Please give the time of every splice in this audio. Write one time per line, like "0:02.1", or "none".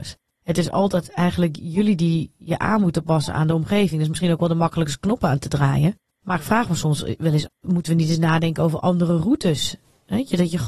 0:07.5